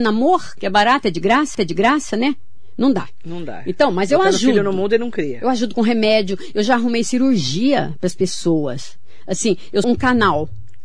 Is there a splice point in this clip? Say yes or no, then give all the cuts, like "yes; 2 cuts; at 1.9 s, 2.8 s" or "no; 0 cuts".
yes; 2 cuts; at 1.5 s, 9.8 s